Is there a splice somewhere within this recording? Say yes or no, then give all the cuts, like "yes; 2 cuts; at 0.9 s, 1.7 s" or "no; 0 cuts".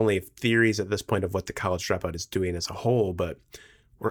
no; 0 cuts